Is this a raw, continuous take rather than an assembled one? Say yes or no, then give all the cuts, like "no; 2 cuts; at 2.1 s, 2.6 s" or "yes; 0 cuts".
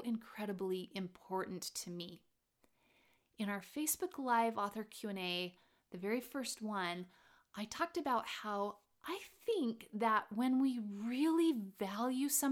yes; 0 cuts